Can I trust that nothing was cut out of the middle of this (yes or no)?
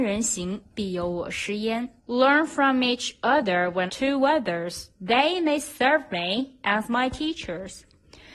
no